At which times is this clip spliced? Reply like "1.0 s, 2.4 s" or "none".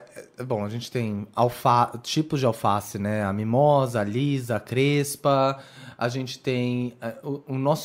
none